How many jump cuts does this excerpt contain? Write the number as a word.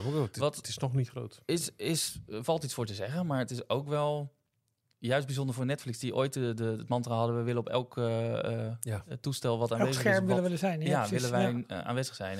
zero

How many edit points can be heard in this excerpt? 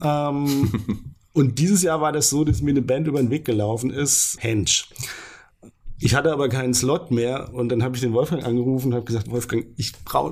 one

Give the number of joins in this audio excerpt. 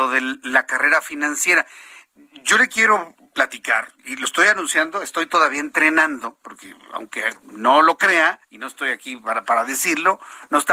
three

